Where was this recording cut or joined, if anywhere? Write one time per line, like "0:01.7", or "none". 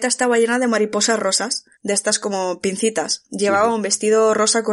0:01.7